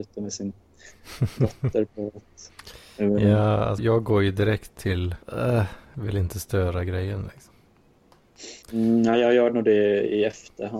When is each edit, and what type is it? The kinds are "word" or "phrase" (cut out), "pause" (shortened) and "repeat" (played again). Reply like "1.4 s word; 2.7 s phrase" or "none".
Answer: 3.8 s word; 5.2 s pause; 8.6 s pause